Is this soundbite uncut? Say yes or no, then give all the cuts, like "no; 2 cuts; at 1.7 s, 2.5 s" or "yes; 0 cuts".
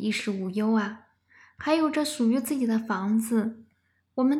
yes; 0 cuts